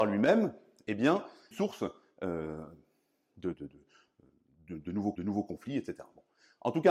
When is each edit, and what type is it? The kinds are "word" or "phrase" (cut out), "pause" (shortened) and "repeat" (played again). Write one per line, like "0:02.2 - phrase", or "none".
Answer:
0:01.5 - phrase
0:03.5 - word
0:05.1 - repeat